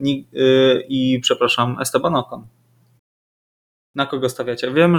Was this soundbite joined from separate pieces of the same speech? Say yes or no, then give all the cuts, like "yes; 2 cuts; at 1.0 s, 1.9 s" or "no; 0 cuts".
no; 0 cuts